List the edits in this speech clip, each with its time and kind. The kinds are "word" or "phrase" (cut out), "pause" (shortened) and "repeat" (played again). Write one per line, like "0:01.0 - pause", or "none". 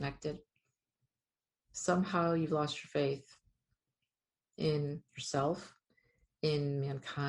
none